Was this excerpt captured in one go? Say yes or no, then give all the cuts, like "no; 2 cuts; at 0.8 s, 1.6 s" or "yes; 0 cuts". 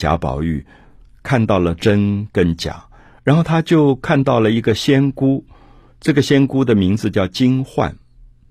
yes; 0 cuts